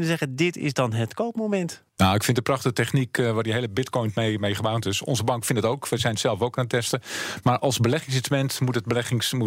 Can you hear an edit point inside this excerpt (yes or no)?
yes